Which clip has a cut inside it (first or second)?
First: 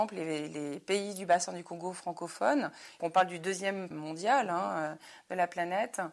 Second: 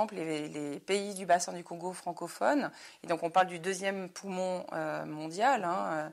first